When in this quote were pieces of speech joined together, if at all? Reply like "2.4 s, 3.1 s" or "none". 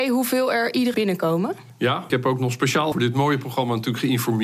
0.9 s, 2.1 s, 2.9 s